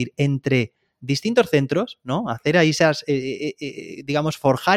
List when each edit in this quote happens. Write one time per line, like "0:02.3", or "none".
none